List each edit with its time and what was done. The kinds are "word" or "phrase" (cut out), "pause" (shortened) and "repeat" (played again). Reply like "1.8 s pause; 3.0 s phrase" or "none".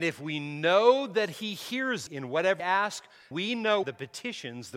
2.1 s word; 2.6 s word; 3.3 s word; 3.8 s phrase